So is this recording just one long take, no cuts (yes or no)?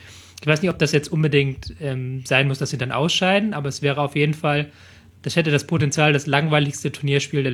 yes